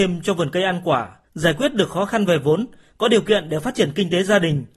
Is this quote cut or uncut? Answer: cut